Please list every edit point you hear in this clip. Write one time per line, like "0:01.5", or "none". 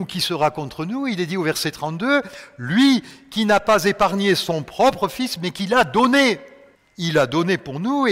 0:06.7